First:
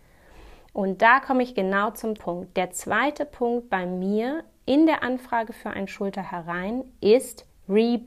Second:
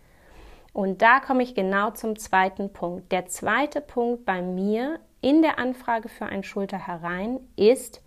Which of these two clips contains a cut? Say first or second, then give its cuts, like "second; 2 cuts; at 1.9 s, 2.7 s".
first; 1 cut; at 2.2 s